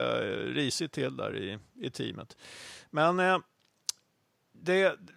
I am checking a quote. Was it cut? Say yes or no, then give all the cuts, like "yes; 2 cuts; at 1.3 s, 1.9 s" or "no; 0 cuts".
no; 0 cuts